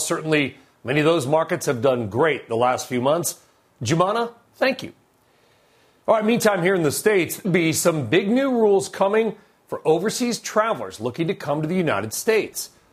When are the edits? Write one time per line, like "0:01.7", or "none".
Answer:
0:07.4